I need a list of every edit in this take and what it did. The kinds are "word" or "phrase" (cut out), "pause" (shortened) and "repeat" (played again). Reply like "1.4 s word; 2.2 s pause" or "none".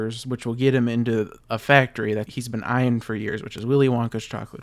1.4 s pause; 2.3 s word